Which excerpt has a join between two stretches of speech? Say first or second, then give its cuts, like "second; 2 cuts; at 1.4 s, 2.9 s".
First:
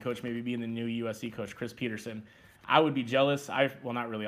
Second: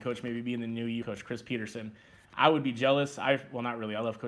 second; 1 cut; at 1.0 s